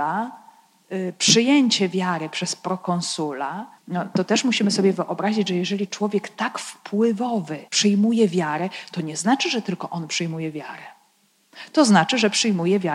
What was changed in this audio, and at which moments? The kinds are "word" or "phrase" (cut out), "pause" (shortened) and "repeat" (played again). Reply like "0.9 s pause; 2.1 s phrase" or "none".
3.8 s pause; 7.7 s pause